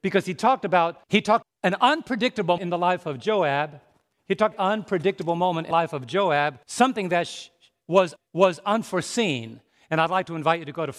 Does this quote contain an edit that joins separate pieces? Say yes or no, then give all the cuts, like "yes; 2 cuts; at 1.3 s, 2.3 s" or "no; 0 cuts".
yes; 8 cuts; at 1.0 s, 1.4 s, 2.6 s, 4.1 s, 4.5 s, 5.7 s, 6.6 s, 8.2 s